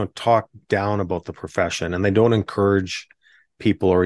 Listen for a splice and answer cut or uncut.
uncut